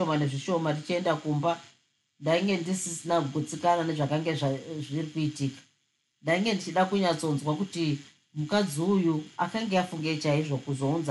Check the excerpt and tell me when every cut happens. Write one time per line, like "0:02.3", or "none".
none